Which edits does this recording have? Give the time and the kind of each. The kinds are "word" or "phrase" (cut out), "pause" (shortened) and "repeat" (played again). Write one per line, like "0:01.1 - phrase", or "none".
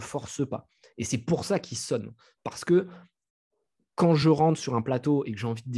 none